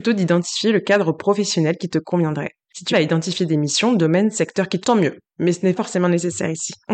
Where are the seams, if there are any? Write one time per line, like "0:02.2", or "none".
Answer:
0:02.9
0:04.8
0:05.8